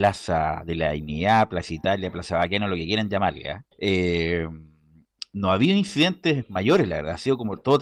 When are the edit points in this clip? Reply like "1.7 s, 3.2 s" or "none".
3.7 s